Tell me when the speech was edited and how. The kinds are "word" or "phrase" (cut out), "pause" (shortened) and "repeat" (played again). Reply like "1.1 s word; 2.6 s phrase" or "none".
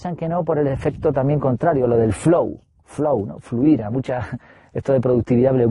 none